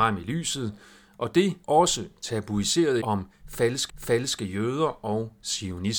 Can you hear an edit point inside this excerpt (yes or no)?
yes